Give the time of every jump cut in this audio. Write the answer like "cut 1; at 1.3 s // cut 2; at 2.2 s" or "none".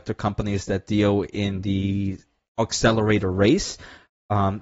none